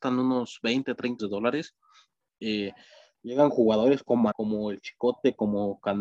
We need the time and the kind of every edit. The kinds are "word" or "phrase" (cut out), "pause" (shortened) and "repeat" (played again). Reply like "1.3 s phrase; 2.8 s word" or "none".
1.2 s word; 4.3 s word